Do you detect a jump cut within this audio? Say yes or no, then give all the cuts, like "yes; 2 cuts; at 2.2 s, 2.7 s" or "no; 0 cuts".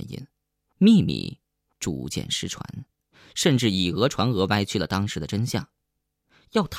no; 0 cuts